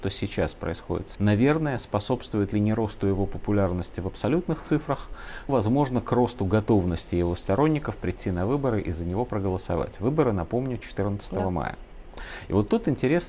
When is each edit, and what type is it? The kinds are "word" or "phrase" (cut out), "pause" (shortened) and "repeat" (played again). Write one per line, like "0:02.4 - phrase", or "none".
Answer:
0:01.1 - word
0:02.5 - word
0:05.5 - word

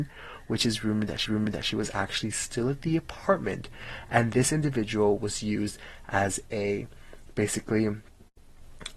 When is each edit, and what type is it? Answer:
0:01.3 - repeat

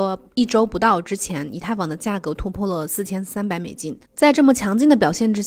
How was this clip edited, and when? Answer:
0:04.1 - pause

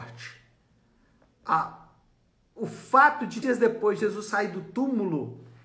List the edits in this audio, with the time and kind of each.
0:03.4 - word

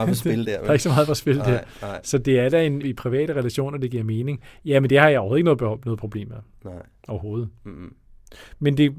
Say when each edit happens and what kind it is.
0:02.8 - word

